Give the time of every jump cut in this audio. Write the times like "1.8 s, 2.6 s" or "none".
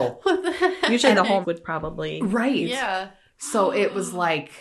1.4 s